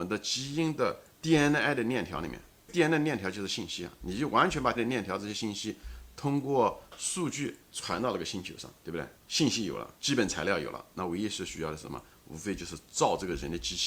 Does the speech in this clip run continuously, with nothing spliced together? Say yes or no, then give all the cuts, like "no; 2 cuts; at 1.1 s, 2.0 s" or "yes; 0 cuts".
no; 7 cuts; at 1.1 s, 2.7 s, 4.8 s, 7.6 s, 8.8 s, 9.2 s, 10.0 s